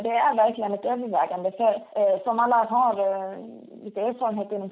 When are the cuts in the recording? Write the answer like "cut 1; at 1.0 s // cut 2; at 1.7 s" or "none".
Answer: cut 1; at 1.9 s // cut 2; at 2.7 s